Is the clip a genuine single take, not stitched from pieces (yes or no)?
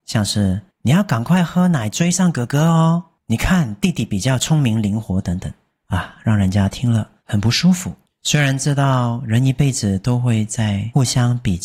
yes